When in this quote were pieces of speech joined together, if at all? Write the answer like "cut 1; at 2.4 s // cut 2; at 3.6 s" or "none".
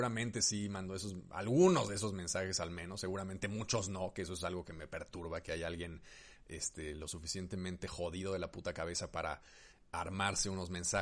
none